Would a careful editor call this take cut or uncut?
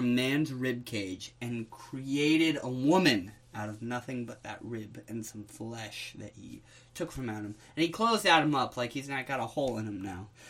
uncut